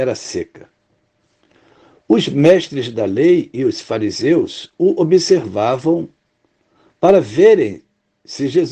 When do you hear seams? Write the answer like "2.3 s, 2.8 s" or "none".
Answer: none